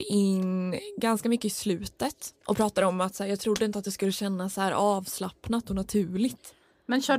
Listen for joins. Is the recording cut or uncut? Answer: uncut